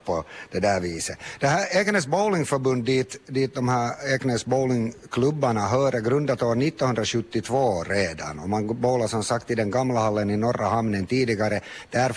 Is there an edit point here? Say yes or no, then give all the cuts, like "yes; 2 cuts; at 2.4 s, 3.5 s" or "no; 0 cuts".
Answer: no; 0 cuts